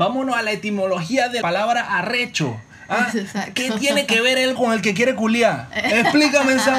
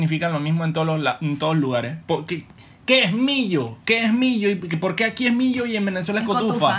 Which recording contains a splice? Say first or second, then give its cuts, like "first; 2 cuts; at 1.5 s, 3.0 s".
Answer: first; 2 cuts; at 1.4 s, 4.5 s